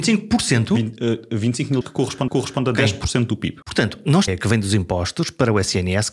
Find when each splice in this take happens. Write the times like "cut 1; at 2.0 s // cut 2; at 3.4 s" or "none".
cut 1; at 1.8 s // cut 2; at 2.3 s // cut 3; at 3.6 s // cut 4; at 4.3 s